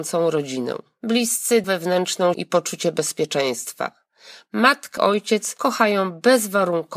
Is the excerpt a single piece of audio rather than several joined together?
no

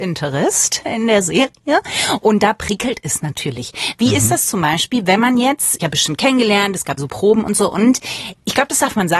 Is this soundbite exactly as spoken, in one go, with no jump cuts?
no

